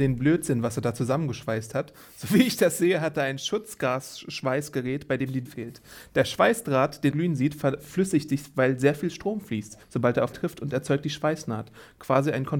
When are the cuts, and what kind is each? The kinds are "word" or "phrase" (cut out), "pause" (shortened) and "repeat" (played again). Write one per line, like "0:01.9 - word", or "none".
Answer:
0:05.5 - word
0:07.1 - word
0:09.8 - pause
0:10.3 - word